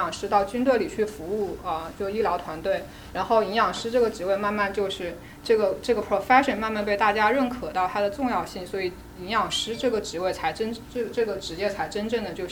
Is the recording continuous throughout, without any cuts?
yes; 0 cuts

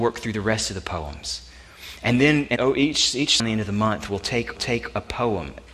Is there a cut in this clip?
yes; 3 cuts; at 2.6 s, 3.4 s, 4.6 s

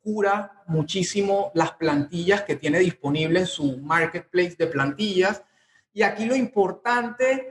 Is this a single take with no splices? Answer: yes; 0 cuts

